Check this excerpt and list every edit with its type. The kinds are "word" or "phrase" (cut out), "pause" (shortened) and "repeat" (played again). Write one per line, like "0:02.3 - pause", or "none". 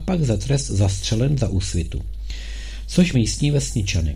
0:03.1 - word